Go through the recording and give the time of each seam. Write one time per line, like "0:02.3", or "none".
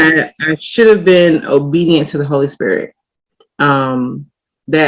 none

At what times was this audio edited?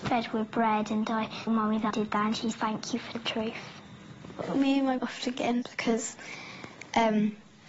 0:01.5
0:01.9
0:02.5
0:03.1
0:05.0
0:05.6

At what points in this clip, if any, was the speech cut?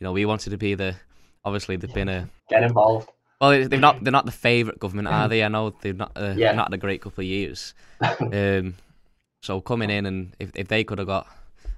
0:02.4

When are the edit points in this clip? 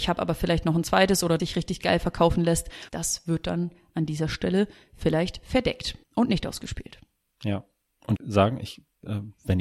0:01.4
0:02.9
0:06.0
0:08.2

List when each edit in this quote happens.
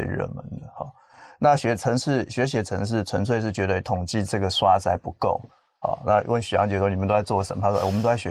none

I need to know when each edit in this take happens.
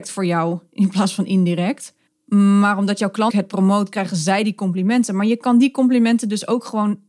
0:02.1
0:03.3

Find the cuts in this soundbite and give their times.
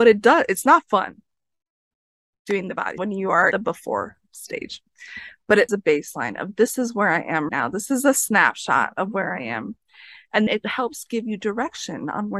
0:03.0
0:03.5
0:05.7
0:07.5
0:10.5

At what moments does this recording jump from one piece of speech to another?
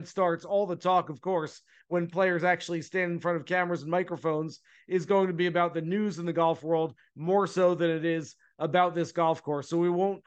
none

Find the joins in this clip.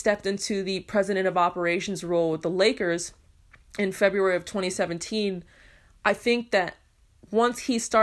none

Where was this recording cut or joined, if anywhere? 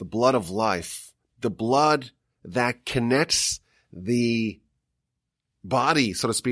none

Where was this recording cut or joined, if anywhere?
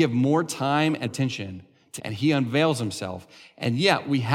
0:01.0
0:02.0

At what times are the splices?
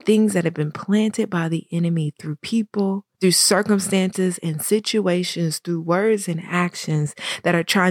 0:03.1

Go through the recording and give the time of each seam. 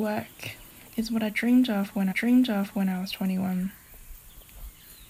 0:02.1

